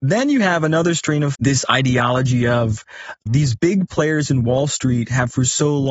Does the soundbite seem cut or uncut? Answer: cut